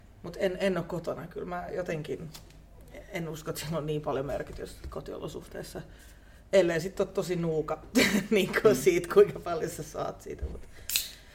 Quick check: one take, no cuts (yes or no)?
yes